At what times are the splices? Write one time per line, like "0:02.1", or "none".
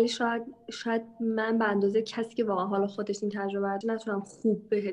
0:03.8

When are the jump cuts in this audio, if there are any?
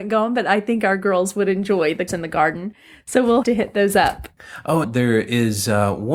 0:02.1
0:03.4
0:04.8

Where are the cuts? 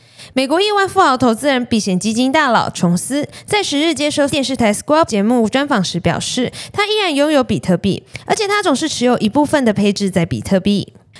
0:04.3
0:05.1

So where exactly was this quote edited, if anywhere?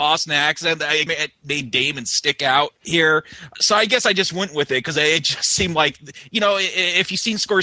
0:01.1

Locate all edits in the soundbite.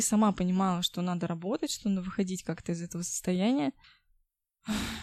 none

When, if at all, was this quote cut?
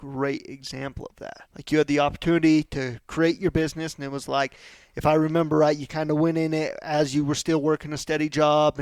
0:01.5

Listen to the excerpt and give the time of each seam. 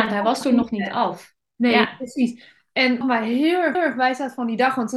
0:03.0
0:03.7

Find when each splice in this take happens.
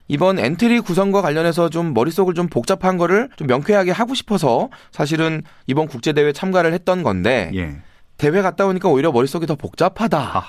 0:03.3
0:08.0

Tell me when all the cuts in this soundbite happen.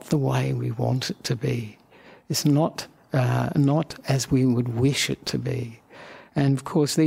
none

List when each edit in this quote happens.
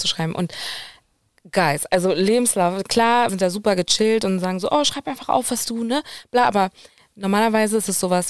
0:03.3

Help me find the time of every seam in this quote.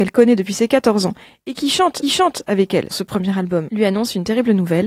0:02.0
0:02.9

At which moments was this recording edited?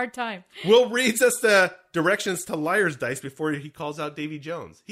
none

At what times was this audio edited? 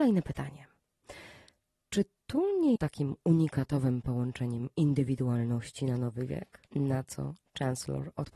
0:02.8
0:06.7

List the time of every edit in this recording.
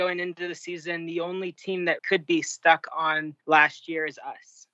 0:02.0
0:03.4

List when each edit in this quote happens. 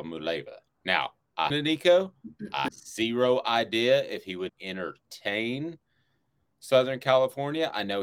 0:01.5
0:02.7
0:04.5

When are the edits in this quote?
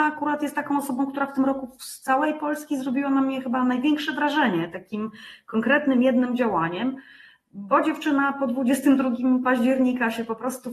none

